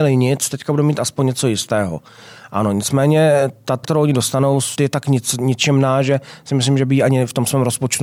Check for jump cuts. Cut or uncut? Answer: cut